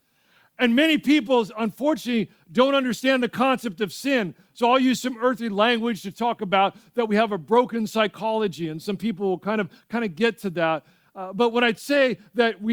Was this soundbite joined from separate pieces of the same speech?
no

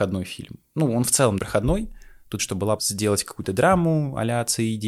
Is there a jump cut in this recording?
yes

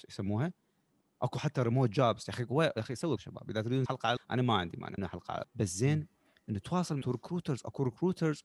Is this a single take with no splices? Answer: no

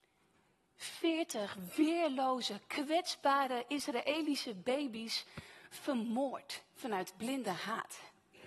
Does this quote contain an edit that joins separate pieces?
no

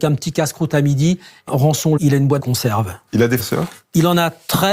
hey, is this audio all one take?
no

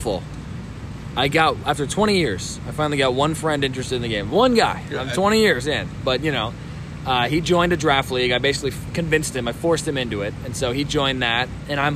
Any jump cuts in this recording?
no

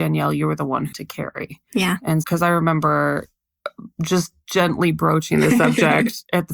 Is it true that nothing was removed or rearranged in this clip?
no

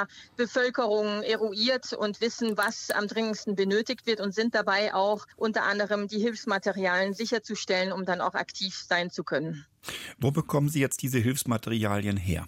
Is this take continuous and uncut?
no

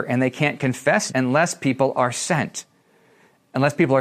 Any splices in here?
yes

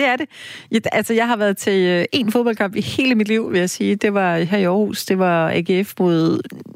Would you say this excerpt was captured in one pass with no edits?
yes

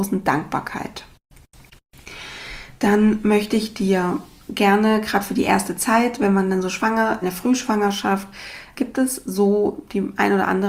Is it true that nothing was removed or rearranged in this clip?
no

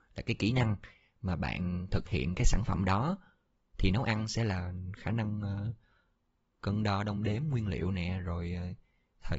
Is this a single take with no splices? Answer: yes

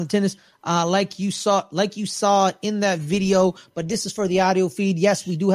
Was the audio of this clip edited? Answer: no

